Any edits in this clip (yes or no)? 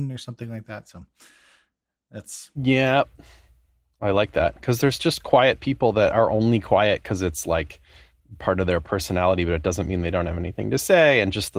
no